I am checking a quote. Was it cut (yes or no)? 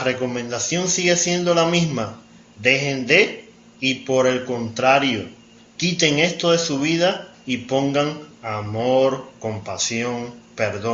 no